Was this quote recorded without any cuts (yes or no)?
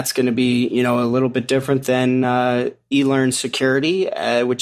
yes